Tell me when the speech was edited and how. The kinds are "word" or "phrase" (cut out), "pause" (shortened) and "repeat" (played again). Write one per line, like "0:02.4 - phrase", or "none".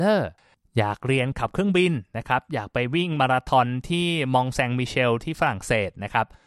none